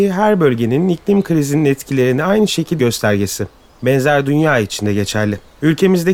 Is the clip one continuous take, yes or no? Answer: no